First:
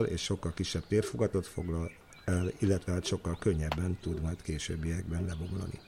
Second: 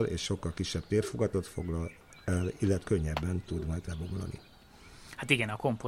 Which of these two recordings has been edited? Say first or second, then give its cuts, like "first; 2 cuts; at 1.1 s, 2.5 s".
second; 2 cuts; at 2.8 s, 3.9 s